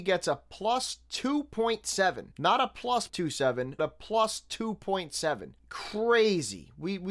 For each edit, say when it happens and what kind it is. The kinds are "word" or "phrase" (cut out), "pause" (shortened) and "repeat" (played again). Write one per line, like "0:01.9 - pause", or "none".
0:02.3 - pause
0:03.1 - word
0:03.8 - word
0:05.6 - pause